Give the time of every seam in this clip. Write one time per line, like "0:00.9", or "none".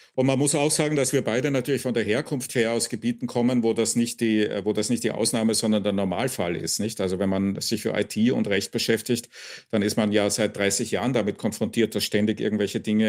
none